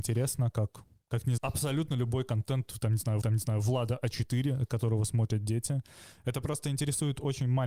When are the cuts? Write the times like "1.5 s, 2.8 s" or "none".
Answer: 1.4 s, 3.2 s